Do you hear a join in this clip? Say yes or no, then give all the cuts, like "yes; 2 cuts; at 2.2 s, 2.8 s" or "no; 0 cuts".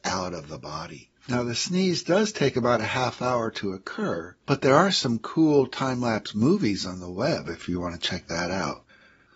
yes; 2 cuts; at 1.2 s, 4.4 s